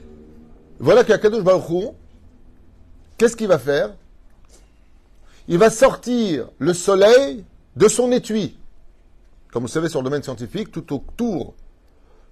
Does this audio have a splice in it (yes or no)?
no